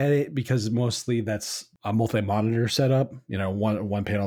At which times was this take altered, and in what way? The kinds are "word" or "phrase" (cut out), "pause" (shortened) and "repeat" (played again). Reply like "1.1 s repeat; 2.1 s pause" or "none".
none